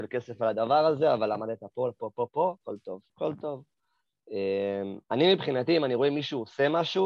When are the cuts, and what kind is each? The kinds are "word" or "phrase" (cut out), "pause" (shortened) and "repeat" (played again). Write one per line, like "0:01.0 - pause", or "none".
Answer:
0:02.0 - word
0:03.1 - pause
0:05.0 - pause